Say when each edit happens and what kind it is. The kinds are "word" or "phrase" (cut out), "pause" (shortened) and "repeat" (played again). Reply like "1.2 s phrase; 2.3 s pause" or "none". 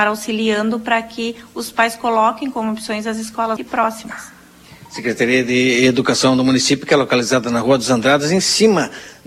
3.6 s word